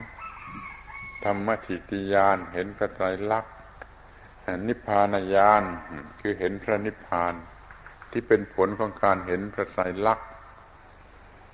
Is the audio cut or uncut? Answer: uncut